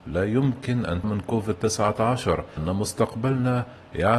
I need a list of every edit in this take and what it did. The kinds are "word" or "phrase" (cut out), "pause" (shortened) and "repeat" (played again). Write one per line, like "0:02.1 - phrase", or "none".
0:01.0 - word
0:02.6 - word